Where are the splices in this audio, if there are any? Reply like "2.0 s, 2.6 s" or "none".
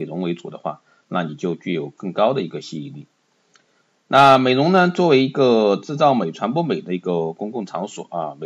none